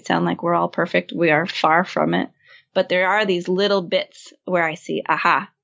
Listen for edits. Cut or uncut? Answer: uncut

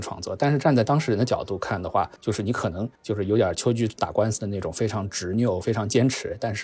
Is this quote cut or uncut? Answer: cut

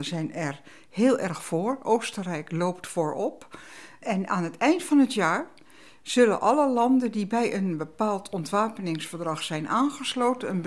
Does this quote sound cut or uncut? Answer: uncut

